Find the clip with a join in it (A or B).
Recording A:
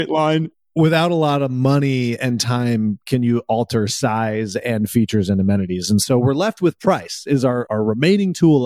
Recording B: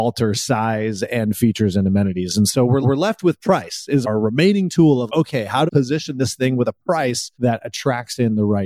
B